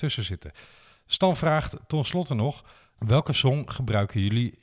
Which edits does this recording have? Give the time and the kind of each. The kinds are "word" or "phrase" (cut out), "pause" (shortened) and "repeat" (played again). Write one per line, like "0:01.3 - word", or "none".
none